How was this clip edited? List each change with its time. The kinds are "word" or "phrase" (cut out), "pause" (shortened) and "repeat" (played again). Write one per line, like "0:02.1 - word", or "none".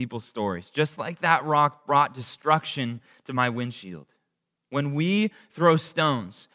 none